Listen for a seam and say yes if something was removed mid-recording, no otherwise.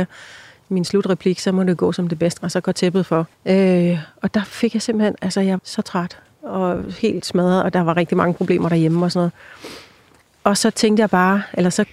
yes